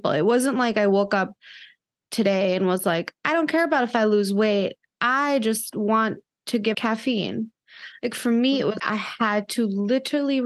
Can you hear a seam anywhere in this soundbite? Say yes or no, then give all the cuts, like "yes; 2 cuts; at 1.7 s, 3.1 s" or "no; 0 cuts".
yes; 2 cuts; at 6.7 s, 8.8 s